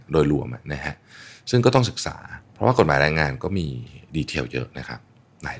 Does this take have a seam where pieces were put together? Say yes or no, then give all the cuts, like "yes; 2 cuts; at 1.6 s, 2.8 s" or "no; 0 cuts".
yes; 1 cut; at 2.4 s